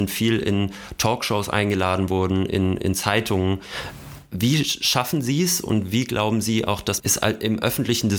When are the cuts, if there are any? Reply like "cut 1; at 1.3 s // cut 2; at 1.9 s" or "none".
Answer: cut 1; at 7.0 s